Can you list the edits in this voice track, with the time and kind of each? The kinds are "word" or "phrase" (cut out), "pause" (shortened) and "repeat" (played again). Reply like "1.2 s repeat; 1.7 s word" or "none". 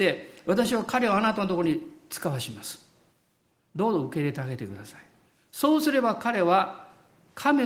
none